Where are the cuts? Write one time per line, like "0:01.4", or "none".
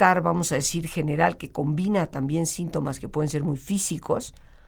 none